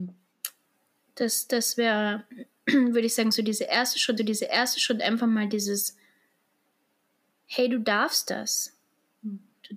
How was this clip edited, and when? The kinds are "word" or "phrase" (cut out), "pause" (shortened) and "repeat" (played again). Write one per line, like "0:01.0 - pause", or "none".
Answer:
0:04.2 - repeat